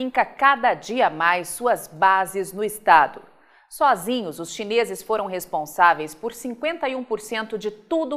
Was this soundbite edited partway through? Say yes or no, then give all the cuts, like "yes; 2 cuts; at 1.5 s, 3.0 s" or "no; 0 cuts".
no; 0 cuts